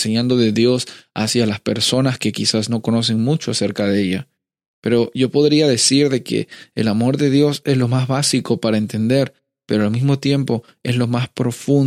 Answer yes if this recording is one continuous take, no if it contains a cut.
yes